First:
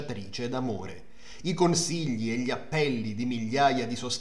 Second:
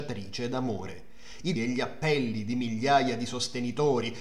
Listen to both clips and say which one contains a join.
second; 1 cut; at 1.6 s

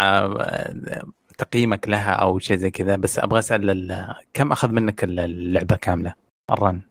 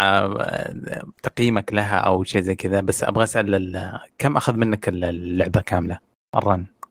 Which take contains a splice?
second; 1 cut; at 1.2 s

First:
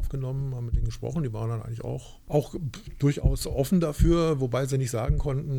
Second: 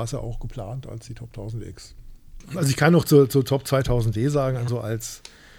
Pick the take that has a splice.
second; 1 cut; at 4.7 s

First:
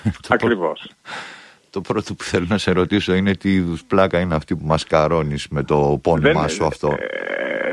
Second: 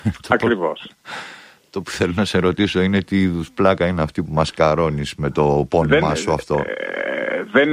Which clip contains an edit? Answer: second; 1 cut; at 1.8 s

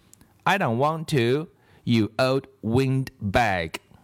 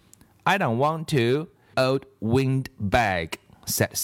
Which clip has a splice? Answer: second; 1 cut; at 1.7 s

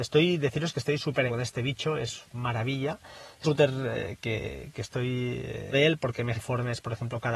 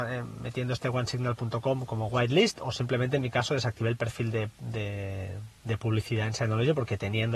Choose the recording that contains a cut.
first; 6 cuts; at 1.3 s, 2.2 s, 3.4 s, 4.2 s, 5.7 s, 6.3 s

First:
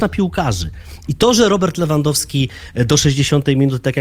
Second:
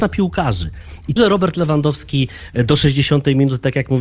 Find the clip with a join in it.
second; 1 cut; at 1.2 s

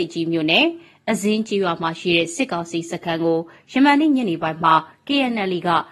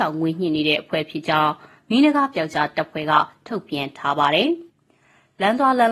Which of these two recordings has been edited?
second; 1 cut; at 4.7 s

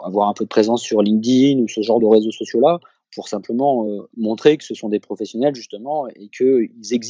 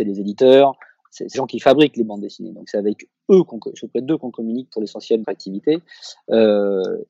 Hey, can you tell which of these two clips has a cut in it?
second; 2 cuts; at 1.3 s, 5.2 s

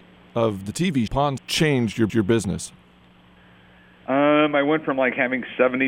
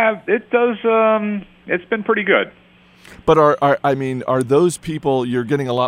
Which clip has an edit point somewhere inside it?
first; 3 cuts; at 1.1 s, 1.4 s, 2.1 s

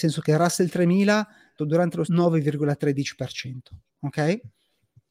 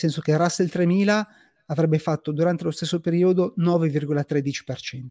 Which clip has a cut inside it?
first; 2 cuts; at 1.6 s, 2.1 s

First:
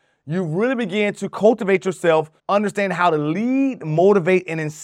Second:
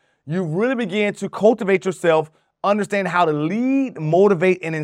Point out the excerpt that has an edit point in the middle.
first; 1 cut; at 2.4 s

